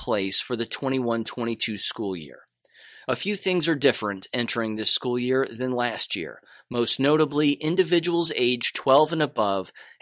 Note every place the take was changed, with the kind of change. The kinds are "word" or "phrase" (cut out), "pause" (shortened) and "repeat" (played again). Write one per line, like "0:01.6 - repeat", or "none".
none